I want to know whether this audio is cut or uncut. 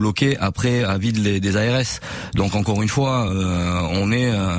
uncut